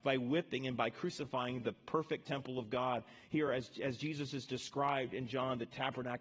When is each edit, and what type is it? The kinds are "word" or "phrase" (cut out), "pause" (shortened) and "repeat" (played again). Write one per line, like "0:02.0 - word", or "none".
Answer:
none